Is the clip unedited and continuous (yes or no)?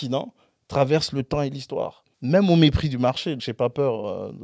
no